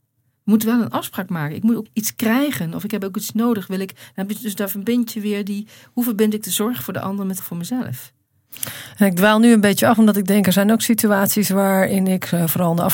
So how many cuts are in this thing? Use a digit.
2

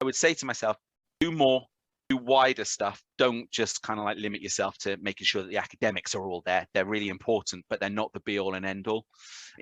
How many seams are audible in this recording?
0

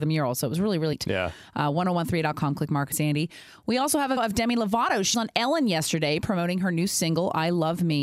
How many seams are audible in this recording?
4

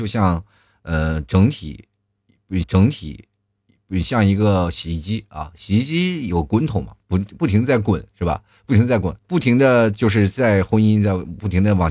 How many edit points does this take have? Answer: 2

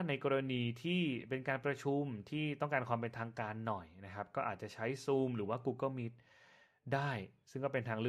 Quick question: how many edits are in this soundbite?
0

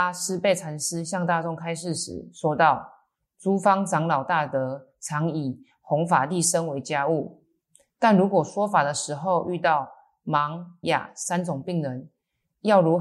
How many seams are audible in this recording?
1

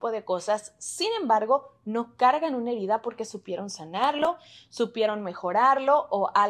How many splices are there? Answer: 0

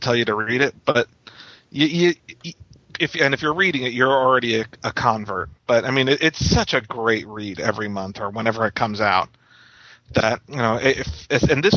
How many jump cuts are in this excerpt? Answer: 3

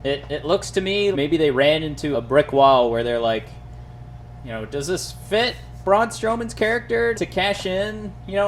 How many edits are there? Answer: 3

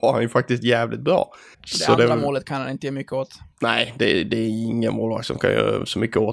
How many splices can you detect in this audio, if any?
2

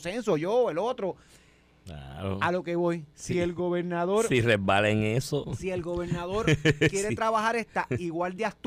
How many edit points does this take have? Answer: 1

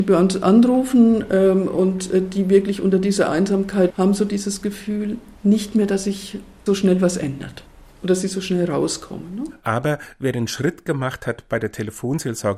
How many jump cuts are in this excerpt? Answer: 3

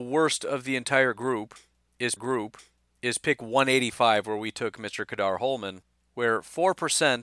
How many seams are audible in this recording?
1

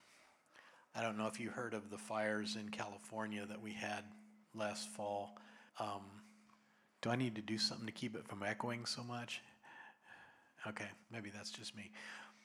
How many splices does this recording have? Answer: 3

